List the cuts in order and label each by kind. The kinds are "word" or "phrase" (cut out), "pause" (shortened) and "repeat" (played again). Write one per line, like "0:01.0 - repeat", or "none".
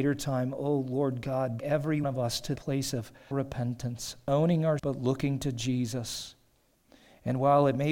0:01.6 - word
0:02.0 - word
0:02.6 - word
0:03.3 - word
0:04.8 - word